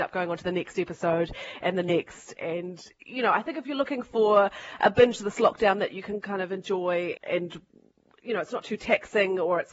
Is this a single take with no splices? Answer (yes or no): no